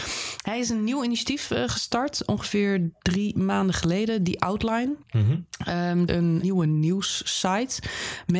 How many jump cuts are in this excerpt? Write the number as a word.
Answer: three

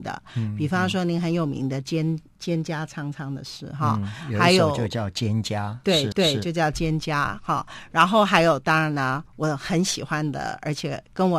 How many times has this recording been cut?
one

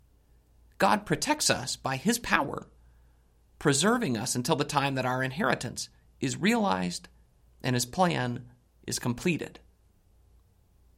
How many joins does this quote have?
zero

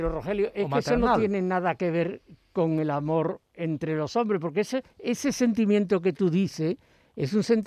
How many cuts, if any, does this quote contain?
zero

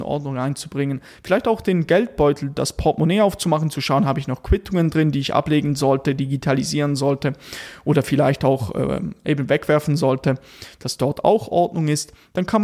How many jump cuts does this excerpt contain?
zero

